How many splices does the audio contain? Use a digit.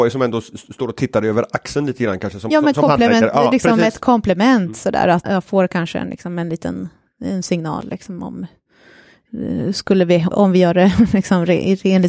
2